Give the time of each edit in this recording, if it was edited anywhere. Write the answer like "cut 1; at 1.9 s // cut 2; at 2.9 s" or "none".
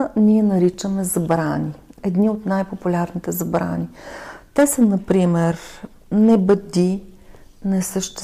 cut 1; at 2.0 s